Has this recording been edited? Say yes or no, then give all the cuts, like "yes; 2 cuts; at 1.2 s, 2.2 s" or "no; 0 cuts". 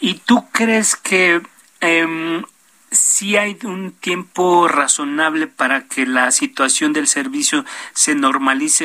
no; 0 cuts